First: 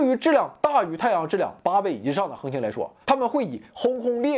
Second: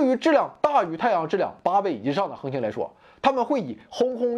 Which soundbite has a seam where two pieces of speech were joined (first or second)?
first